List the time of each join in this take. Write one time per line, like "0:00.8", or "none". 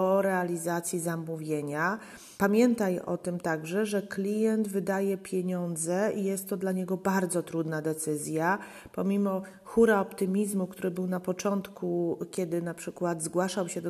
0:02.4